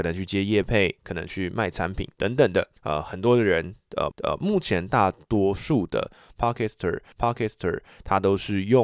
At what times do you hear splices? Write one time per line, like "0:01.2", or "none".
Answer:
0:02.8
0:04.1
0:07.1

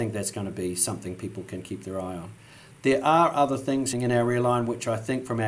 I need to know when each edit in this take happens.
0:03.9

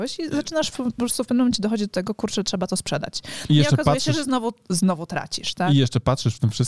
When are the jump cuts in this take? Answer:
none

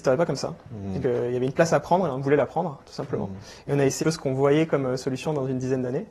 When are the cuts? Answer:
0:01.0
0:04.0

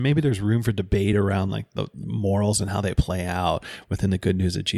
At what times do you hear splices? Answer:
none

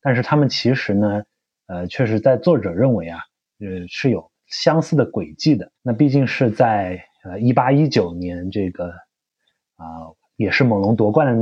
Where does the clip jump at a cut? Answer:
0:05.7

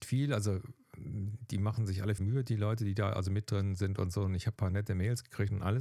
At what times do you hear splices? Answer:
0:02.2
0:04.6

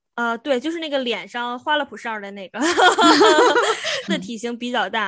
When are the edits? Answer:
0:04.1

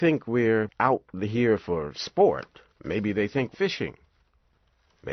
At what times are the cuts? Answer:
0:02.7
0:03.5

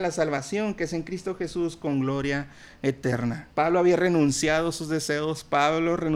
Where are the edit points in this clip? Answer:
0:03.5

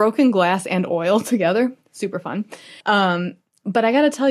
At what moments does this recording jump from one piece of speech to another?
0:02.8

